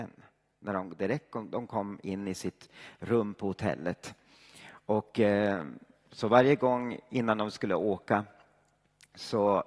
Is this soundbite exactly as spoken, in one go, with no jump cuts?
yes; 0 cuts

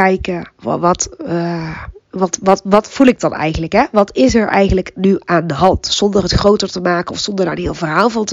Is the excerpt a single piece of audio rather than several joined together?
yes; 0 cuts

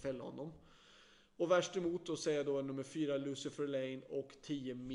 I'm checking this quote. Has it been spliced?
no; 0 cuts

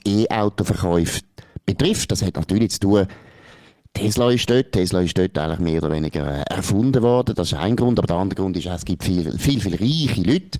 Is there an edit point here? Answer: no; 0 cuts

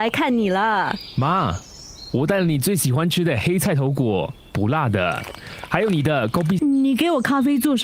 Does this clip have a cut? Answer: yes; 1 cut; at 6.6 s

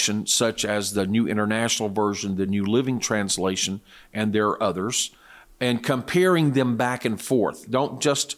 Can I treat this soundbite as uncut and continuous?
yes; 0 cuts

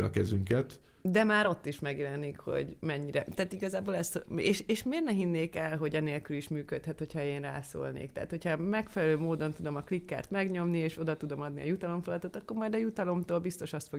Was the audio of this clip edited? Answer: no; 0 cuts

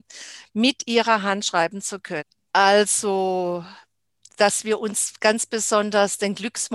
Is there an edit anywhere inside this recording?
no; 0 cuts

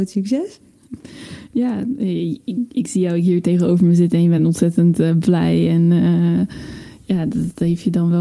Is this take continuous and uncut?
yes; 0 cuts

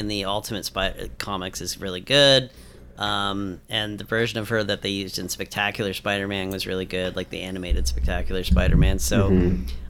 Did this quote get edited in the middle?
no; 0 cuts

